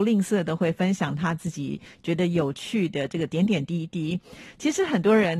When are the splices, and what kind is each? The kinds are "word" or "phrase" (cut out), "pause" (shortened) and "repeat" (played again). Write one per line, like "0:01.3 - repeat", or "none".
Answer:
none